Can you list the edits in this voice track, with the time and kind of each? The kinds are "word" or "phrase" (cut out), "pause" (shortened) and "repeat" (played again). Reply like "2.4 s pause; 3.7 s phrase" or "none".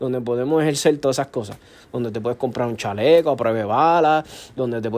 none